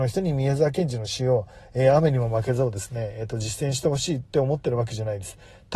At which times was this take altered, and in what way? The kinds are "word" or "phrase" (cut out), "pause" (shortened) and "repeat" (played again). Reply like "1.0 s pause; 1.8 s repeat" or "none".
none